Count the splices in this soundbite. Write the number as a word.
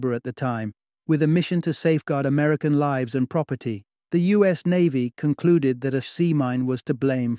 two